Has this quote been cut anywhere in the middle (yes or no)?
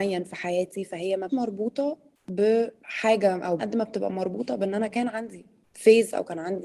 yes